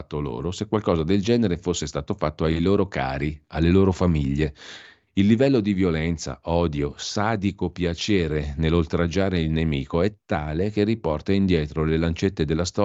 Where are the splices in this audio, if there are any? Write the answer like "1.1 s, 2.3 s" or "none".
none